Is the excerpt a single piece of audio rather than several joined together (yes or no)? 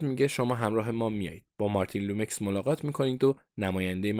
yes